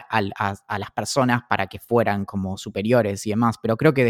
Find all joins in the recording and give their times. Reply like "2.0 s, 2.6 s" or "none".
none